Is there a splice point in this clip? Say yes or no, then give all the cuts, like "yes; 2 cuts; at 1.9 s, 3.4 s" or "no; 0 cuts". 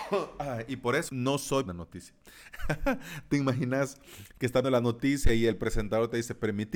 yes; 3 cuts; at 1.1 s, 1.7 s, 4.6 s